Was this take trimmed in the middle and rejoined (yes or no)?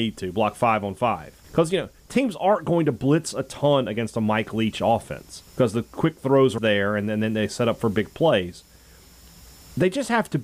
yes